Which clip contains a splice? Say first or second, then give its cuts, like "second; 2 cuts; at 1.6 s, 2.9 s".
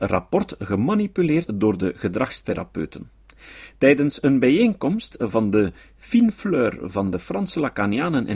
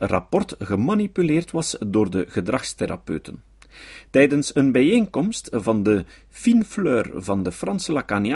first; 1 cut; at 1.5 s